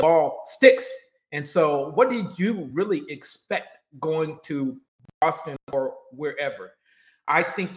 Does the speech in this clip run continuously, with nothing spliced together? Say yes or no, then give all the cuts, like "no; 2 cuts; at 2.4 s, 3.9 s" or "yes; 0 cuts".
yes; 0 cuts